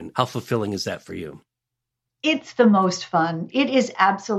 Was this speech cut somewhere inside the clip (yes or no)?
no